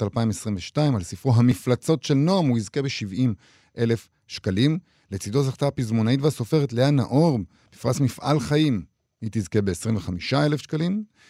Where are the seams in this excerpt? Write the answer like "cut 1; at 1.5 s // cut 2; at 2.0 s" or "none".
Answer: none

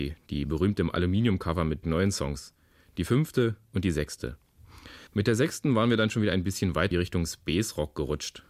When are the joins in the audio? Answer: cut 1; at 1.8 s // cut 2; at 5.1 s // cut 3; at 6.9 s

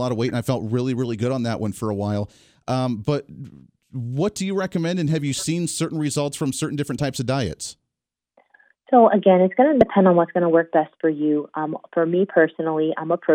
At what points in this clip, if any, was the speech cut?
none

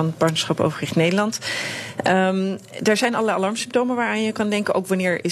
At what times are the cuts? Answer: none

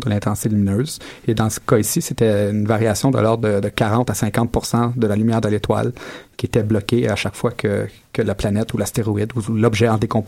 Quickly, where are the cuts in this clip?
none

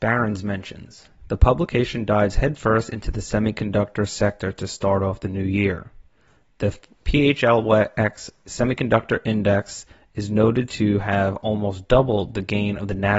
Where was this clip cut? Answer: none

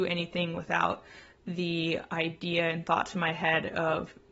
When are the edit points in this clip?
none

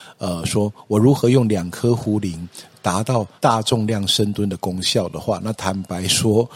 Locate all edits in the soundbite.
cut 1; at 3.4 s

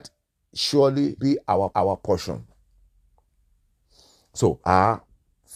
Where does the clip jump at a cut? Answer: cut 1; at 1.2 s // cut 2; at 1.7 s // cut 3; at 4.6 s

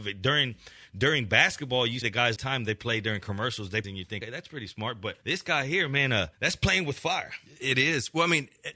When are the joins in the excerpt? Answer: cut 1; at 2.0 s // cut 2; at 2.4 s // cut 3; at 3.8 s // cut 4; at 4.2 s // cut 5; at 5.2 s // cut 6; at 6.3 s

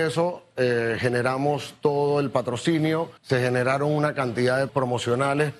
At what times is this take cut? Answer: cut 1; at 3.2 s // cut 2; at 4.7 s

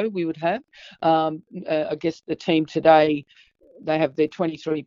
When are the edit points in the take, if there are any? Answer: none

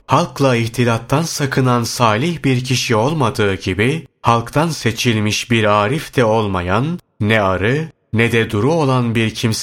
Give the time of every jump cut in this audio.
none

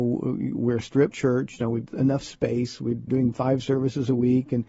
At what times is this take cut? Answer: cut 1; at 1.1 s // cut 2; at 1.9 s // cut 3; at 3.1 s

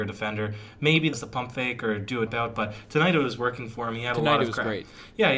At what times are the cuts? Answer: cut 1; at 1.1 s // cut 2; at 2.3 s

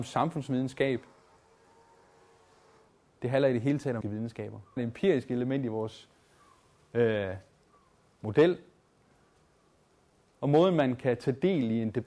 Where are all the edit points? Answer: cut 1; at 4.0 s // cut 2; at 4.8 s

